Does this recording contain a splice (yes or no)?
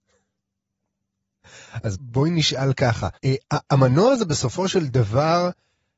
yes